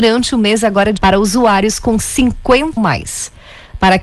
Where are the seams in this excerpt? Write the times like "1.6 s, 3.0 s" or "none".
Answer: 1.0 s, 2.8 s